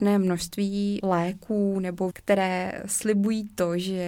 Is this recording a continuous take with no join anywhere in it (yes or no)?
no